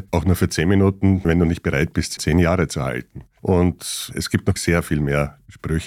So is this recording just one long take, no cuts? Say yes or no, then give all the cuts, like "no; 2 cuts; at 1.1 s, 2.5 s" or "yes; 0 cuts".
no; 3 cuts; at 1.2 s, 2.2 s, 4.6 s